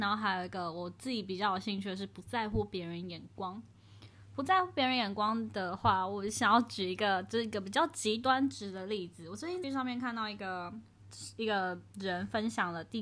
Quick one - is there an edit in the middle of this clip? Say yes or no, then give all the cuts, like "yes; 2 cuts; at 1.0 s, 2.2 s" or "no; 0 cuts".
yes; 1 cut; at 9.6 s